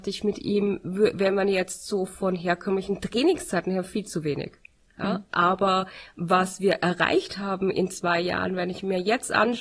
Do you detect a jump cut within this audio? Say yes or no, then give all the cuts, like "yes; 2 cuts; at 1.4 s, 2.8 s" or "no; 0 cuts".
no; 0 cuts